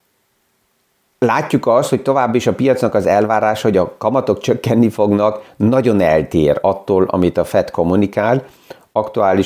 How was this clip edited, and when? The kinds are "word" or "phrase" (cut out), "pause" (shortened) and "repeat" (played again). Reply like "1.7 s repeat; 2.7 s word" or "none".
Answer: none